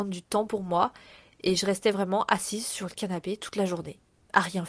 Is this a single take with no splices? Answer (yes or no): yes